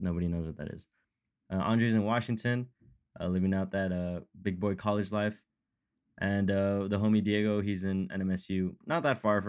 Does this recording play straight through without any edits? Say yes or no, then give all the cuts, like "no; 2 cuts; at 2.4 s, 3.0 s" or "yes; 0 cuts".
yes; 0 cuts